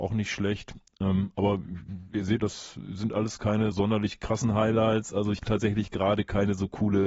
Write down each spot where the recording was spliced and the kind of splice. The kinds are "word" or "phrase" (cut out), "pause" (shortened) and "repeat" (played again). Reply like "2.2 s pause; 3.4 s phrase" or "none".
2.4 s word; 3.7 s word; 5.4 s word